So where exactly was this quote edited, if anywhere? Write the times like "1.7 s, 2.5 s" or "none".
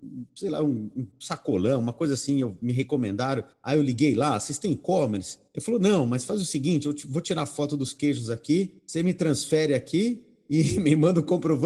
3.5 s, 5.5 s, 8.8 s